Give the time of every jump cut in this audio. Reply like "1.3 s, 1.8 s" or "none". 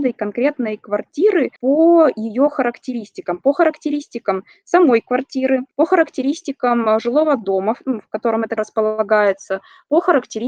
1.6 s, 5.7 s, 8.6 s